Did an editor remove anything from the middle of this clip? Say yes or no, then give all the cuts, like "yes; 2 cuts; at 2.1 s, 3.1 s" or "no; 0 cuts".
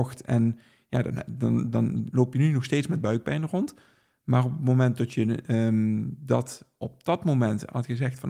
no; 0 cuts